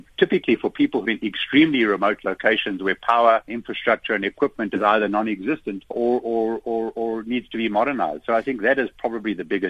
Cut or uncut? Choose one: cut